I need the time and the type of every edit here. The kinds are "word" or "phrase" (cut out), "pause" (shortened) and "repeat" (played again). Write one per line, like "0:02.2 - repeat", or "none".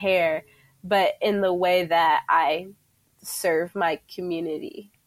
none